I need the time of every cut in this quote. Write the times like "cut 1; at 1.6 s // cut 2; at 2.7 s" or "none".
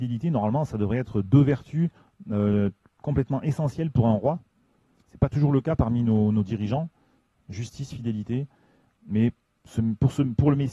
none